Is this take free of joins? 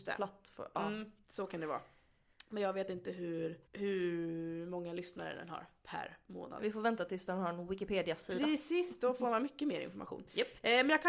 no; 1 cut; at 3.7 s

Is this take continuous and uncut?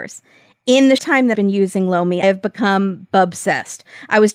no; 3 cuts; at 1.0 s, 1.3 s, 2.2 s

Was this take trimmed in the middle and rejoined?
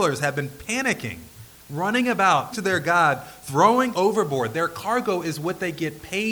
yes; 2 cuts; at 2.5 s, 3.9 s

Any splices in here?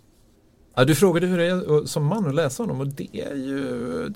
no; 0 cuts

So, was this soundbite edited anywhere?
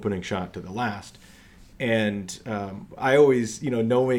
no; 0 cuts

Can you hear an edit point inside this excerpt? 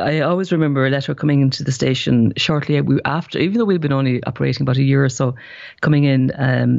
no; 0 cuts

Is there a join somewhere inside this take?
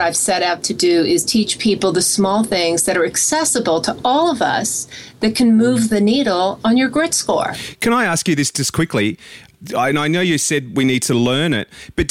no; 0 cuts

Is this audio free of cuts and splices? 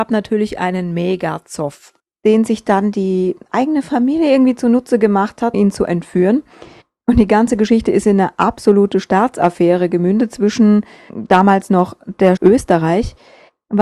no; 2 cuts; at 5.5 s, 12.4 s

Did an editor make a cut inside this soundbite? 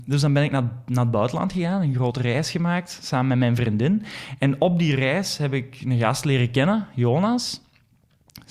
no; 0 cuts

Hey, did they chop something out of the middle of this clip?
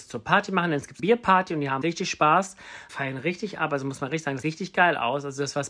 yes; 4 cuts; at 1.0 s, 1.8 s, 2.9 s, 4.4 s

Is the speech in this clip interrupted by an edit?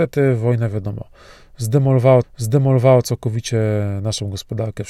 yes; 1 cut; at 2.2 s

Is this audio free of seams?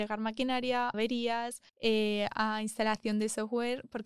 no; 2 cuts; at 0.9 s, 1.7 s

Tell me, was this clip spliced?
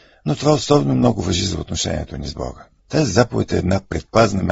yes; 1 cut; at 2.8 s

